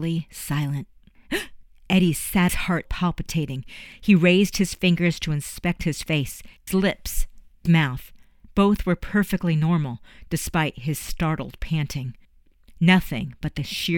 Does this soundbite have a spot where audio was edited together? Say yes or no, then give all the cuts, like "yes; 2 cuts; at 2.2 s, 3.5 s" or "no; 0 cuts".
yes; 4 cuts; at 2.5 s, 2.9 s, 6.7 s, 7.7 s